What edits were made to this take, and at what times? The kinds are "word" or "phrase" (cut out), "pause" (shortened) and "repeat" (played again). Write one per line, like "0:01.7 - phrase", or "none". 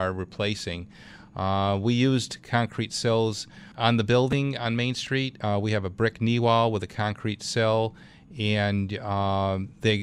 0:03.7 - pause